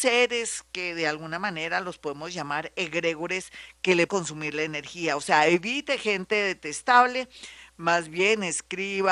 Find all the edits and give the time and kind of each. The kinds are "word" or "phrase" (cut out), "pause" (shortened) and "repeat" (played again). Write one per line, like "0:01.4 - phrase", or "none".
0:04.1 - word